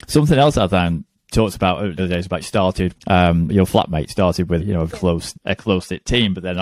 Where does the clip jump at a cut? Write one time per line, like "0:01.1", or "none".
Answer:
0:01.3
0:02.0
0:02.4
0:02.9
0:03.5
0:04.1
0:04.6
0:04.9
0:05.3

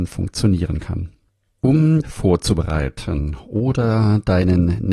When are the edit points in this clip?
0:02.0

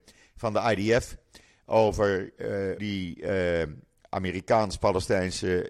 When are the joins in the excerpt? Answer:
0:02.8

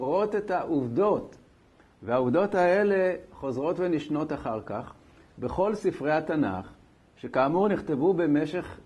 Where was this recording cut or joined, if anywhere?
none

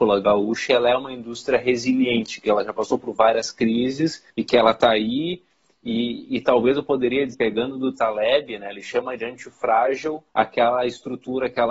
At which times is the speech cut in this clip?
0:04.3
0:07.3
0:10.3

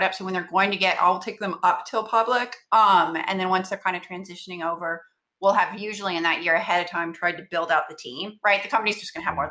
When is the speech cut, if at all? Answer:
none

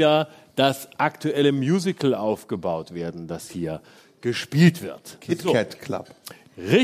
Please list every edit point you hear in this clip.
none

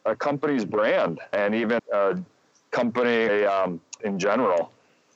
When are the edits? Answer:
0:01.3
0:01.8
0:03.3
0:04.0

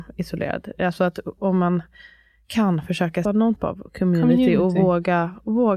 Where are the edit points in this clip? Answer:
0:03.2
0:03.6

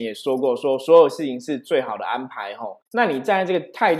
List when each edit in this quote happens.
0:02.9

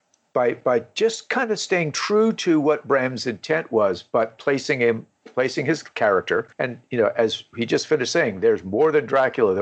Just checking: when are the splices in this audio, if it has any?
0:06.5

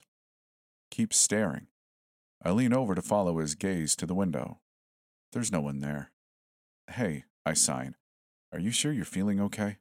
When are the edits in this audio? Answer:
none

